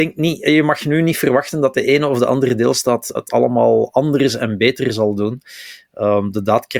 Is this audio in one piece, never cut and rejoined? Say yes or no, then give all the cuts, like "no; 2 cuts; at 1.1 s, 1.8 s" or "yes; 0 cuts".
no; 1 cut; at 3.2 s